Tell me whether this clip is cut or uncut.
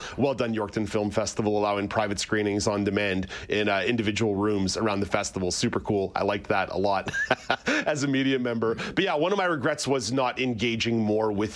uncut